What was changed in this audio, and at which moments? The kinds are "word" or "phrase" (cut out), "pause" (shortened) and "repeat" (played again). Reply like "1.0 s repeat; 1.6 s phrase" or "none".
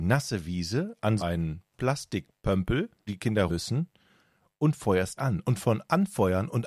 1.2 s word; 3.1 s word; 3.5 s word; 5.2 s word